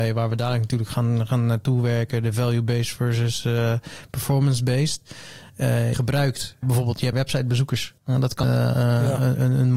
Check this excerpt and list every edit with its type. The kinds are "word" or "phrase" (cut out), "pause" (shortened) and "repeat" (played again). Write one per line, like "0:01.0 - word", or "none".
0:05.9 - phrase
0:06.6 - word
0:07.1 - word
0:08.0 - pause
0:08.4 - word